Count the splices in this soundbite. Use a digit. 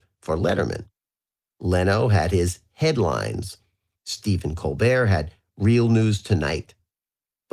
0